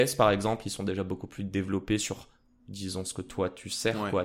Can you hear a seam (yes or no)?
no